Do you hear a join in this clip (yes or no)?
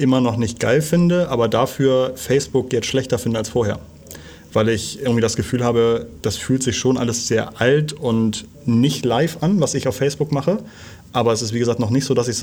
yes